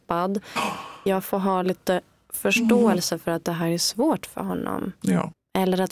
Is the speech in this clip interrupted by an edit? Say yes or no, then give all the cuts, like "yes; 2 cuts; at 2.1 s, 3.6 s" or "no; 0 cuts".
no; 0 cuts